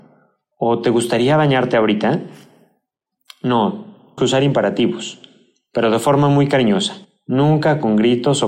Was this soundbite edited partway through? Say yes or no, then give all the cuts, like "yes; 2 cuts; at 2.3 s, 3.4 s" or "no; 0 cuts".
yes; 2 cuts; at 4.2 s, 7.0 s